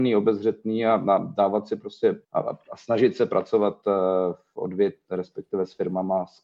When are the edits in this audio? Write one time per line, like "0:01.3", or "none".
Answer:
0:02.2